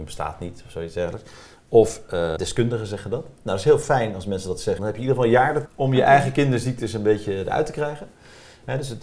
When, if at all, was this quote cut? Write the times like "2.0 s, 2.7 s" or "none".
2.4 s, 4.8 s, 5.7 s

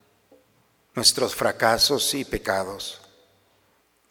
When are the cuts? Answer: none

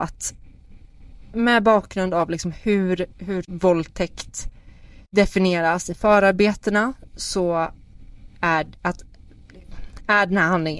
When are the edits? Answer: 1.3 s, 3.4 s, 5.0 s

